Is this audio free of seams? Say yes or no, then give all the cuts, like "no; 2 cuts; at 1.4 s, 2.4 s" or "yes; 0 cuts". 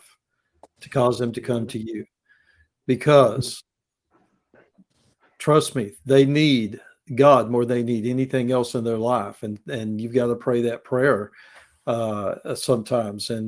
yes; 0 cuts